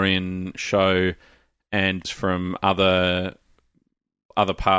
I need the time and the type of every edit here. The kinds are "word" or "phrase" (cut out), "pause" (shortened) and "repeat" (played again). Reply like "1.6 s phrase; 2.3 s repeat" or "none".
2.0 s phrase